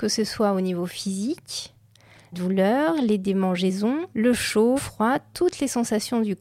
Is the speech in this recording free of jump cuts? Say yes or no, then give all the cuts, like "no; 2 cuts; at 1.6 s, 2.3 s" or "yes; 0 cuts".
no; 3 cuts; at 2.3 s, 4.1 s, 4.8 s